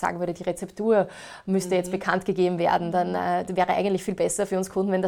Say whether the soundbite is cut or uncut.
uncut